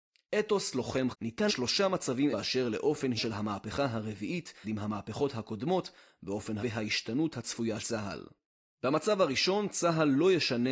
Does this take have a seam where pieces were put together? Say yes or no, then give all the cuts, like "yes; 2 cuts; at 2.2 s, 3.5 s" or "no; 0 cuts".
yes; 7 cuts; at 1.1 s, 1.5 s, 2.3 s, 3.2 s, 4.6 s, 6.6 s, 7.8 s